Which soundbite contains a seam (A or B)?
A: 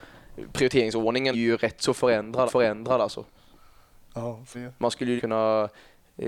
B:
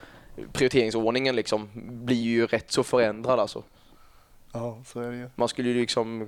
A